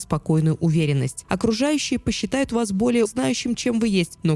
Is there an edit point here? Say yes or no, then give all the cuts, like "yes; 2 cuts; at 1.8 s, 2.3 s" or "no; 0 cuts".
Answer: yes; 1 cut; at 3.1 s